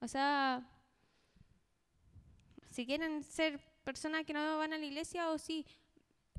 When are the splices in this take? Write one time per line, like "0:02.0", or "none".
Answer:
0:02.6